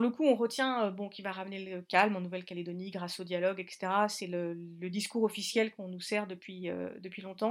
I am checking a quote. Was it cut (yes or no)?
no